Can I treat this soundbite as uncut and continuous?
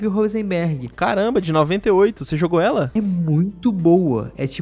yes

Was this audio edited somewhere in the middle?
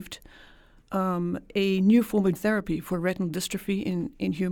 yes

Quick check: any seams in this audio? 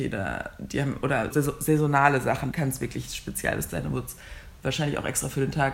yes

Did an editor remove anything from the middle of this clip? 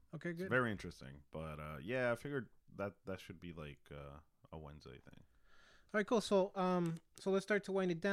no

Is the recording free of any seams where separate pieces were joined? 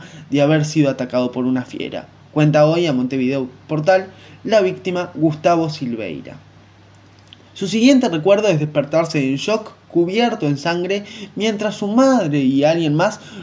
yes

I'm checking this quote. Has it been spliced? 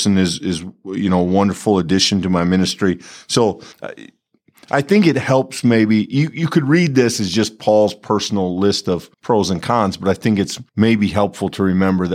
yes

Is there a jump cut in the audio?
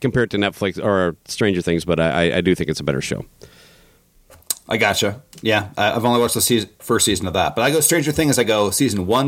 no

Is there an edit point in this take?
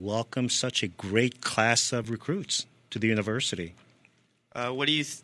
no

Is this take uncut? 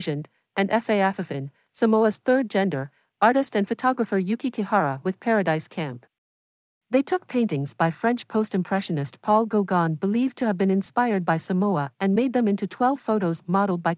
yes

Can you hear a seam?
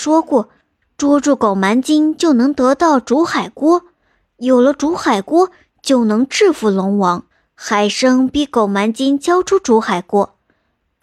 no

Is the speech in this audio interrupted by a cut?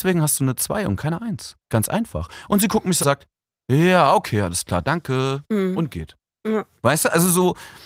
yes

